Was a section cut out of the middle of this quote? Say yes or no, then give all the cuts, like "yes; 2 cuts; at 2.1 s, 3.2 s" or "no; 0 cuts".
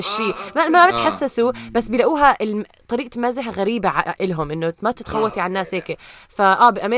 no; 0 cuts